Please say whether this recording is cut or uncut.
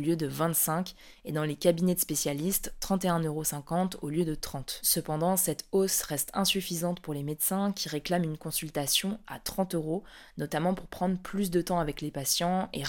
uncut